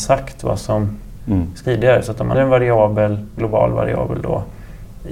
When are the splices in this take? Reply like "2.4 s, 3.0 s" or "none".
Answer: 1.6 s, 2.3 s, 3.4 s